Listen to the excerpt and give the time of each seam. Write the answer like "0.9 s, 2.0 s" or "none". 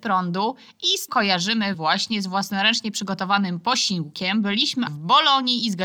1.1 s, 1.7 s, 4.9 s